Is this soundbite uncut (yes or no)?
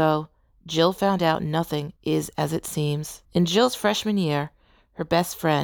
no